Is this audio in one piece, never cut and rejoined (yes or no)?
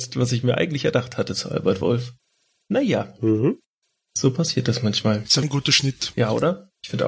no